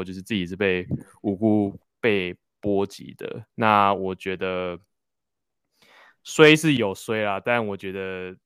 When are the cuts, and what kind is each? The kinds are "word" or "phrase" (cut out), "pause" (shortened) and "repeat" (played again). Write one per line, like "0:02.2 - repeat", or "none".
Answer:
0:03.5 - pause

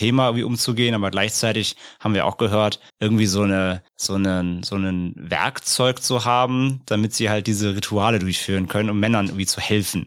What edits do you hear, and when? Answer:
0:02.9 - pause
0:03.9 - pause

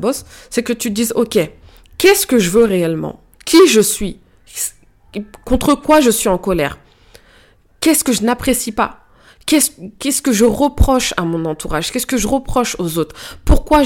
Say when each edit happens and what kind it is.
none

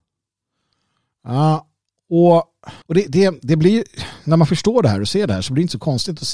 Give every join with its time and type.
0:02.8 - pause

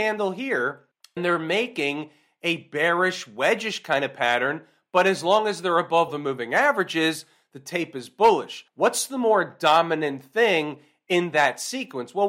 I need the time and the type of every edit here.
0:01.2 - word
0:06.1 - word
0:08.7 - pause

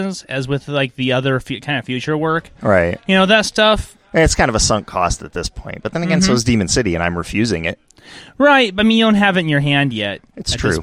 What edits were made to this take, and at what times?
none

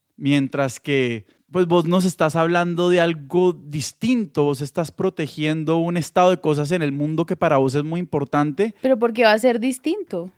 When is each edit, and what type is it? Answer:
0:08.8 - pause

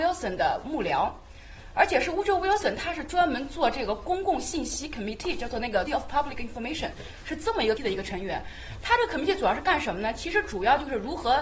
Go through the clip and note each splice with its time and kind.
0:05.9 - word
0:07.8 - word

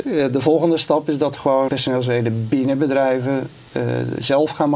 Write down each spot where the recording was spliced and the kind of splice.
0:01.7 - word

